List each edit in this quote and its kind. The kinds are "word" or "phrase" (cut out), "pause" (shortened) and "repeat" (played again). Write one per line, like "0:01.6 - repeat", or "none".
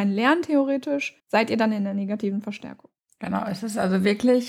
0:01.2 - pause
0:03.0 - pause

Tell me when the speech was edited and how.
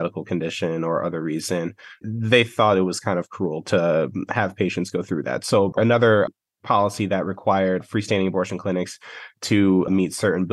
none

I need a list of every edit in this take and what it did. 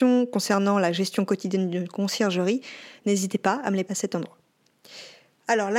0:03.9 - word

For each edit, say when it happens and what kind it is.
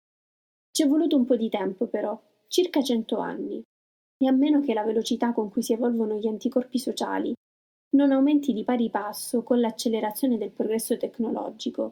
none

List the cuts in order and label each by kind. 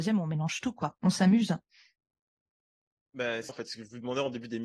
0:03.5 - word

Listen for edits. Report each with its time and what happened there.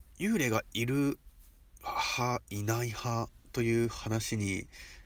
0:03.4 - pause

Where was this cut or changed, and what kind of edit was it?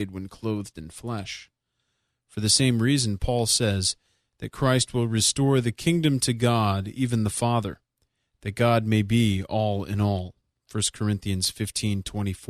none

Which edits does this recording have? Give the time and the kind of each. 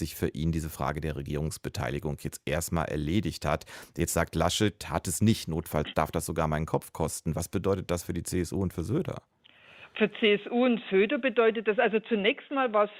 none

